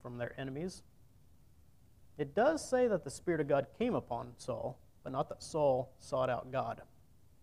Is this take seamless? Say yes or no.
yes